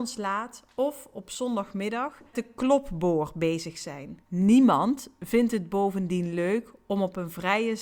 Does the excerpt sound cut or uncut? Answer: cut